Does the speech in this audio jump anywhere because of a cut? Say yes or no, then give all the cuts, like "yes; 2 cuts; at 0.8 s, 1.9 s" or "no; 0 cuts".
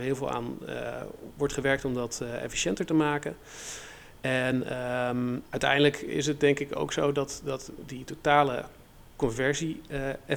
no; 0 cuts